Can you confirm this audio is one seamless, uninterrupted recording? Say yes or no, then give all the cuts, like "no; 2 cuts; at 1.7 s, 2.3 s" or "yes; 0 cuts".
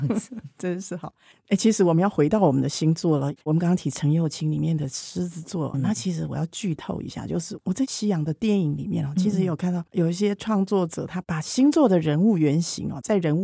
no; 4 cuts; at 1.3 s, 3.4 s, 5.7 s, 9.9 s